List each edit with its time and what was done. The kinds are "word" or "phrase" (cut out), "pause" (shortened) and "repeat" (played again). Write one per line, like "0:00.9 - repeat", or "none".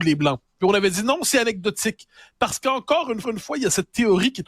0:03.2 - repeat